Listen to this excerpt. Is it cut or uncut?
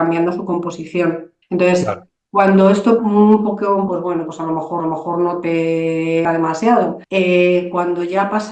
cut